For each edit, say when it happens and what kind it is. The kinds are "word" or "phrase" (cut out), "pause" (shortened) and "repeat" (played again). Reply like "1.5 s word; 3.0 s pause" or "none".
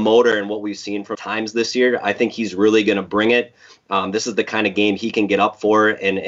1.1 s phrase